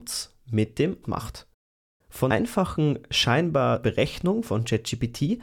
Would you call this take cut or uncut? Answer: cut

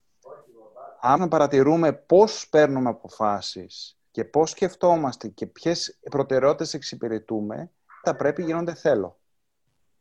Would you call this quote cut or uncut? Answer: cut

